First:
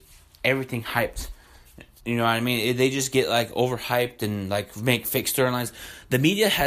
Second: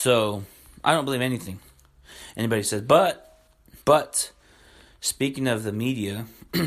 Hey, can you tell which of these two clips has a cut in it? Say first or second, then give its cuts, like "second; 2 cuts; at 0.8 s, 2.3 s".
second; 1 cut; at 3.8 s